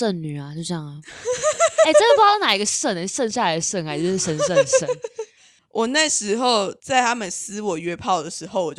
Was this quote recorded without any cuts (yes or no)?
yes